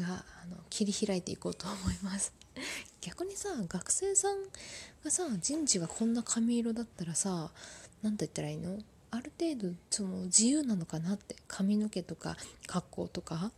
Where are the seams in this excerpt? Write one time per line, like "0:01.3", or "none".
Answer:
0:09.8